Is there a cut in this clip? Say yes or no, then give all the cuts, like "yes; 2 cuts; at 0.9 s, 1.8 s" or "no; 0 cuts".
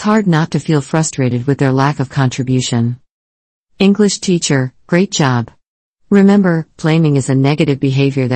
no; 0 cuts